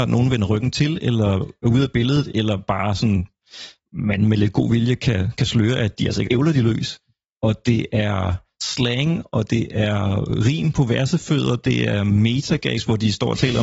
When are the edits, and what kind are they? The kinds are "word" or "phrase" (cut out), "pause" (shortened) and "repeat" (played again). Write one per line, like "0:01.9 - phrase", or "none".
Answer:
0:06.3 - phrase